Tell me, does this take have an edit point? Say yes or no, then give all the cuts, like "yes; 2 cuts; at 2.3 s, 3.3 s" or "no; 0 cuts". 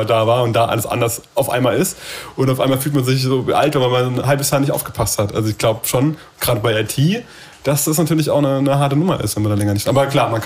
no; 0 cuts